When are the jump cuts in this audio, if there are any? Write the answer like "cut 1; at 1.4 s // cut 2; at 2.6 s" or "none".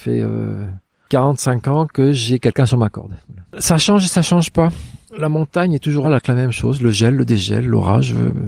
cut 1; at 3.5 s // cut 2; at 5.0 s // cut 3; at 6.0 s